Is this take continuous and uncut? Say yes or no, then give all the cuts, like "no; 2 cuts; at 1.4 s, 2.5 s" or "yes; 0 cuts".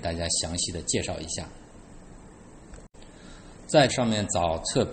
no; 1 cut; at 3.9 s